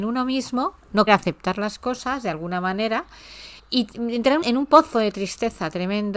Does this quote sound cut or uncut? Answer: cut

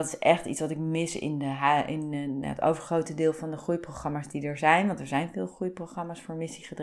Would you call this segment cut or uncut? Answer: uncut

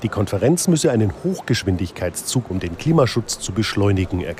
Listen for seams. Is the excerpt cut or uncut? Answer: cut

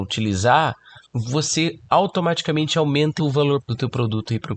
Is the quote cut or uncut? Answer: cut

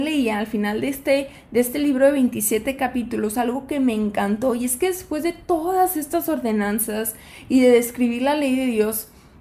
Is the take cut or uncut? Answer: uncut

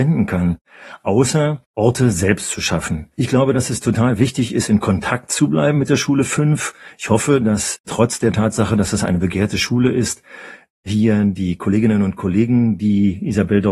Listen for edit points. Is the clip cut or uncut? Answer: cut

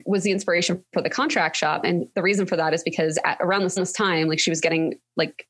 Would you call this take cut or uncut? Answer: cut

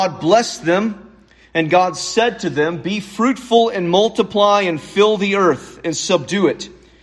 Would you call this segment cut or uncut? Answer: uncut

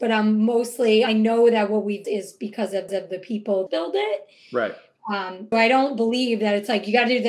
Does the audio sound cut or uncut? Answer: cut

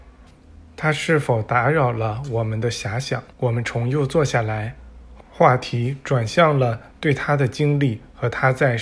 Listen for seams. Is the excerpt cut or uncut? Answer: cut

